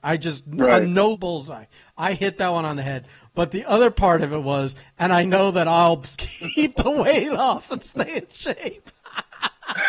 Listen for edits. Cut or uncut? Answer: cut